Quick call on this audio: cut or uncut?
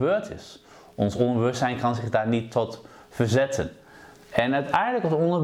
uncut